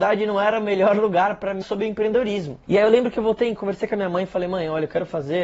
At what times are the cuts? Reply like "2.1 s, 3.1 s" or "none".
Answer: 1.6 s, 2.6 s, 3.6 s